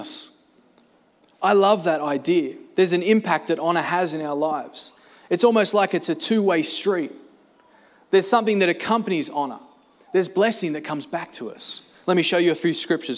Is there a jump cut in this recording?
no; 0 cuts

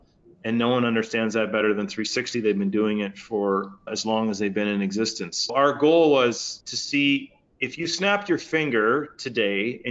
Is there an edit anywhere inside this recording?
no; 0 cuts

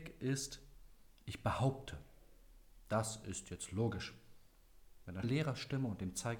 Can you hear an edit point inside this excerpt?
yes; 1 cut; at 5.2 s

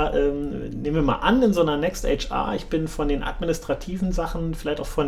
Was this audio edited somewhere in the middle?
no; 0 cuts

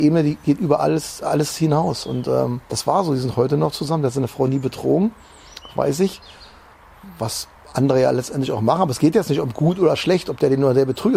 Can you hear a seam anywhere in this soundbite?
yes; 1 cut; at 2.6 s

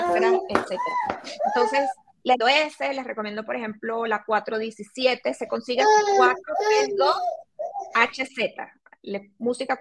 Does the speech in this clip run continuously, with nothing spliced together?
no; 1 cut; at 2.4 s

